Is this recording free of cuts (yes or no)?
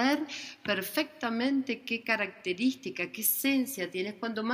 yes